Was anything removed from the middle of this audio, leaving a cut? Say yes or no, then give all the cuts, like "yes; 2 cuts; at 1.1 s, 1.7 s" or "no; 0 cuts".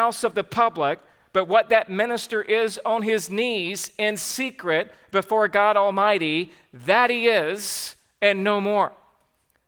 no; 0 cuts